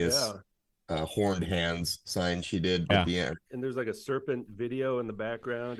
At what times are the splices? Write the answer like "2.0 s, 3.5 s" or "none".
2.9 s, 3.4 s

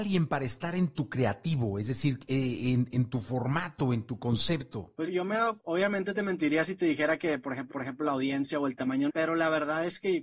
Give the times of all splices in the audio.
5.1 s, 5.6 s, 7.7 s, 9.1 s

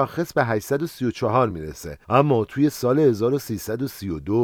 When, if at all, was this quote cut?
none

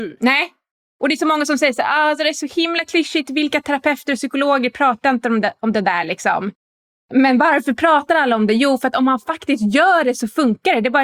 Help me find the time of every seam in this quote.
none

